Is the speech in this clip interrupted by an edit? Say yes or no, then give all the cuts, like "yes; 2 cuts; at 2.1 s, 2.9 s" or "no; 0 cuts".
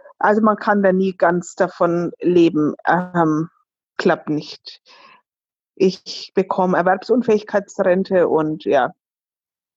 yes; 1 cut; at 4.0 s